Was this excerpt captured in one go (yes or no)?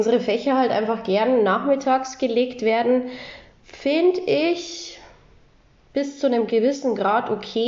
yes